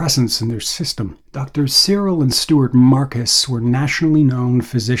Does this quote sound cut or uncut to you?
cut